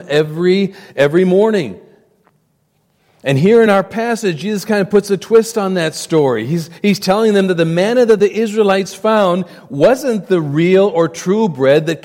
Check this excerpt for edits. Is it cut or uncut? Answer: uncut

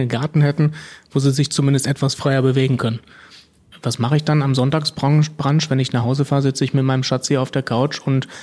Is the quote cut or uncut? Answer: uncut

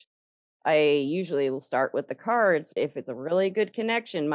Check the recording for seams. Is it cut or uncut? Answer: cut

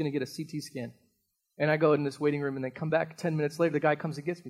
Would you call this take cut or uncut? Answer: uncut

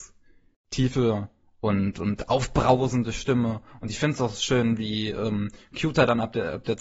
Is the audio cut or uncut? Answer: uncut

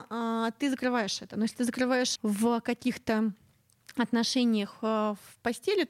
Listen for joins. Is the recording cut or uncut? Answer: cut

